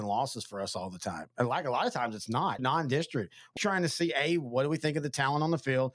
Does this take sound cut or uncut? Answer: cut